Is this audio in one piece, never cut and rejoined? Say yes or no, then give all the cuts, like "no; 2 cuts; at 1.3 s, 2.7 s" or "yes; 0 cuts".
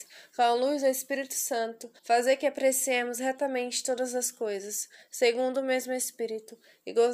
no; 1 cut; at 2.0 s